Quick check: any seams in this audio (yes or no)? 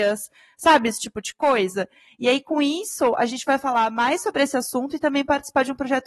no